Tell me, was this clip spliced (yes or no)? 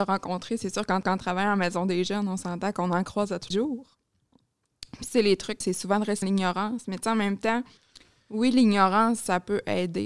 yes